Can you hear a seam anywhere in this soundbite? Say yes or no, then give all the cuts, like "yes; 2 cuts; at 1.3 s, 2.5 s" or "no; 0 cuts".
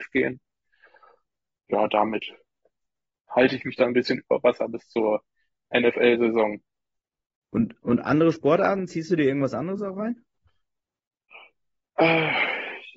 no; 0 cuts